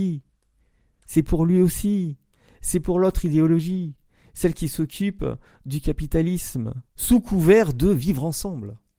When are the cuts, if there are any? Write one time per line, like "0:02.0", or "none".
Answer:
0:06.9

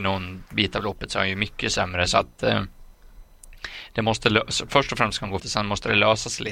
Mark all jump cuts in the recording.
0:05.4

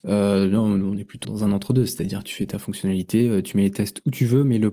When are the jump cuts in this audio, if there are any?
0:01.2

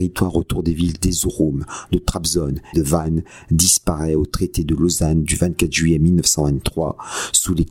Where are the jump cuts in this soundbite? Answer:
0:02.7

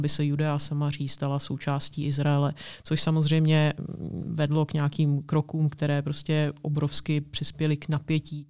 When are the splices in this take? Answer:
none

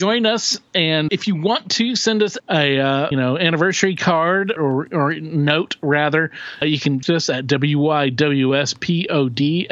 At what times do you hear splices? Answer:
0:01.1
0:02.4
0:03.1
0:04.6
0:06.6
0:07.0

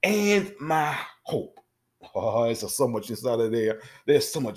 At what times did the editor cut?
none

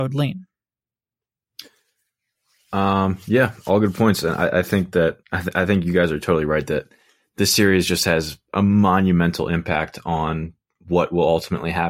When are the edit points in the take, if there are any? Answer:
0:05.2

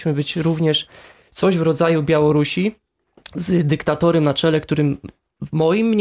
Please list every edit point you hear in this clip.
none

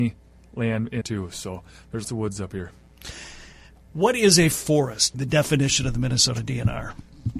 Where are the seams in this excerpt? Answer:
0:01.0
0:02.0
0:05.1

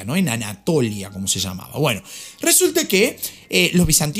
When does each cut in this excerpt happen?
none

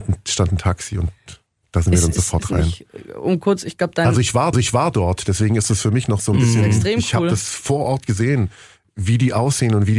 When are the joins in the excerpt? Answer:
0:04.5

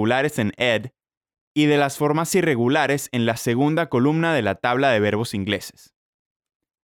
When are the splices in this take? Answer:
none

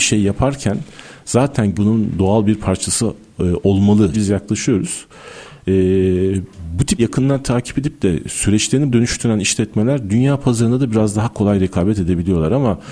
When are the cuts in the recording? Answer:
0:01.7
0:04.1
0:07.0
0:08.9

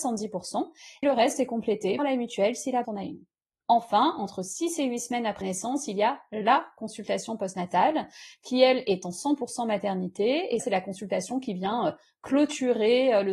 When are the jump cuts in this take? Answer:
0:01.0
0:02.0
0:02.8
0:05.4
0:10.6

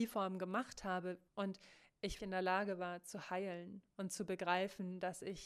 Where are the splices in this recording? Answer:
0:01.3
0:02.2

